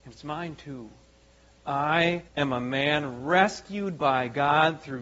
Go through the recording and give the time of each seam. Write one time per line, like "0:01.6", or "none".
0:02.3